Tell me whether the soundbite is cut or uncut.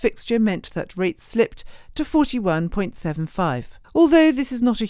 cut